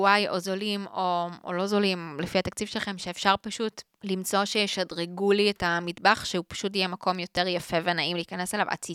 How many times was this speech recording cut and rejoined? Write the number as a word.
zero